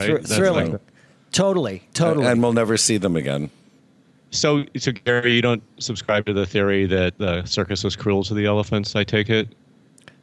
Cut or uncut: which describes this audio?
uncut